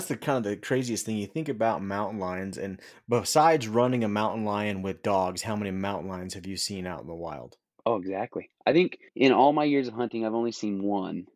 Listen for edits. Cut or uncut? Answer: cut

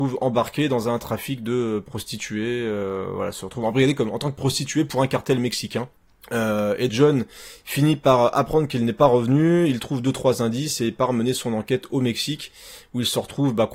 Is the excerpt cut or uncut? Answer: cut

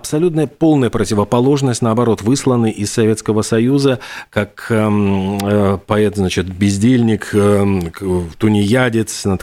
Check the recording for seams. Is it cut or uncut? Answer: uncut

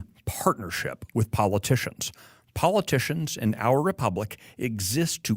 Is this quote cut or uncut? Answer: uncut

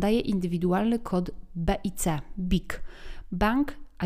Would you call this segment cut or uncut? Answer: uncut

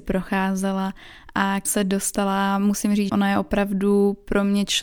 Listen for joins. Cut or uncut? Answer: cut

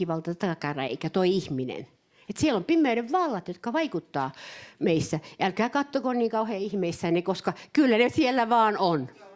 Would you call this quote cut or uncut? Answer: uncut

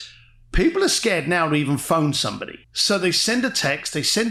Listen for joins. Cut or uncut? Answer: cut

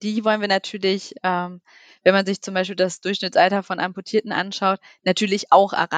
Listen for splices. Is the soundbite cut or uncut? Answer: uncut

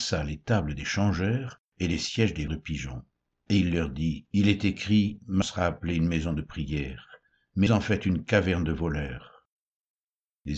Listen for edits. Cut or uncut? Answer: cut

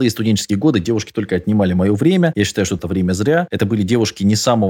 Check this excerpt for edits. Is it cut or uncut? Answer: cut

